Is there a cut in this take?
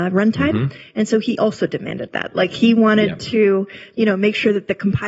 no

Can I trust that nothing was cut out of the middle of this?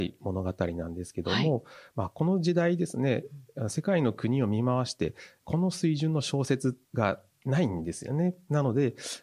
no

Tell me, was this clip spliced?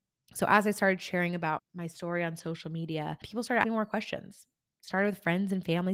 yes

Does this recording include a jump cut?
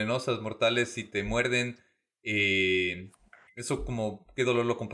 no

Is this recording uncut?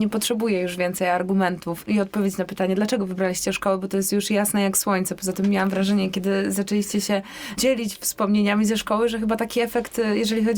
yes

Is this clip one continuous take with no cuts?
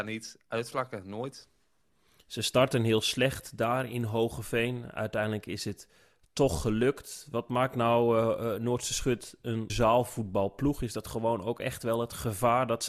no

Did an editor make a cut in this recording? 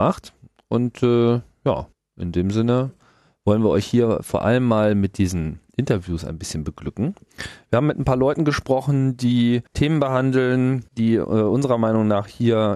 yes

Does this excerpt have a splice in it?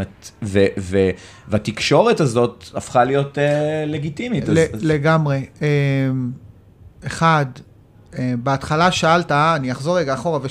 no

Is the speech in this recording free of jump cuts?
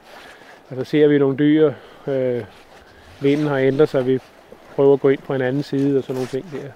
yes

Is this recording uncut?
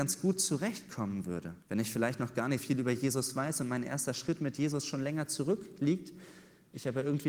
no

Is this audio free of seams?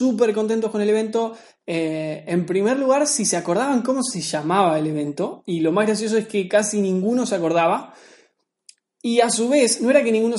yes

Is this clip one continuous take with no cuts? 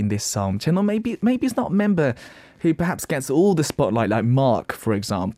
yes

